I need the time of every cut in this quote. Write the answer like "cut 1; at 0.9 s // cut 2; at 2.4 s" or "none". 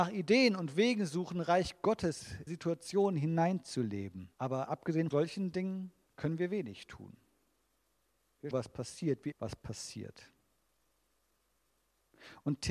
cut 1; at 2.5 s // cut 2; at 4.3 s // cut 3; at 5.1 s // cut 4; at 6.0 s // cut 5; at 8.5 s // cut 6; at 9.3 s